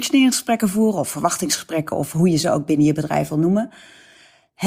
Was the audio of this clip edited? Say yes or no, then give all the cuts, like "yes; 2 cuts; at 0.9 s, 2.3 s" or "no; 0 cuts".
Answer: no; 0 cuts